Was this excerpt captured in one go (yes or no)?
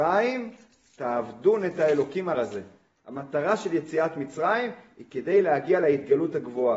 no